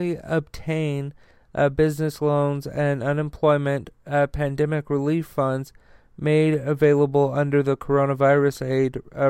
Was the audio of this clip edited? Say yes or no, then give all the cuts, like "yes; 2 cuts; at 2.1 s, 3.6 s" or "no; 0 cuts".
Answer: no; 0 cuts